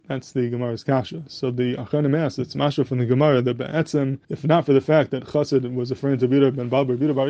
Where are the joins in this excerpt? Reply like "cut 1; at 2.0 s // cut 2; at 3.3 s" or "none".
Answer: cut 1; at 4.2 s